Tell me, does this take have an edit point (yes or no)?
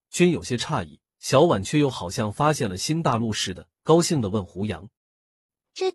yes